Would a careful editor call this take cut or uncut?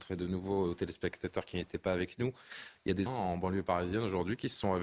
cut